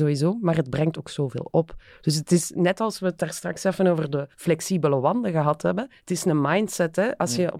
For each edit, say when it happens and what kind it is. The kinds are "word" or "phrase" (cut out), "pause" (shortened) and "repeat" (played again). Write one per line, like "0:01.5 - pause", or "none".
0:04.3 - pause
0:06.0 - pause